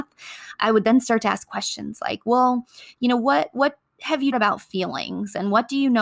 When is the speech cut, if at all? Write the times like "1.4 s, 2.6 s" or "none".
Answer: 4.3 s